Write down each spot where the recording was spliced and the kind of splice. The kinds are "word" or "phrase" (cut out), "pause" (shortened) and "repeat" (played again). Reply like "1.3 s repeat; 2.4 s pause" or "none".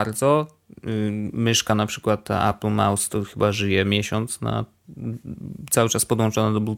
none